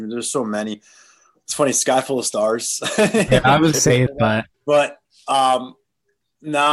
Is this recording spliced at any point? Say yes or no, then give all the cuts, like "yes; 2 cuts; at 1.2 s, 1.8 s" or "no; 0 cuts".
yes; 3 cuts; at 3.7 s, 4.1 s, 4.5 s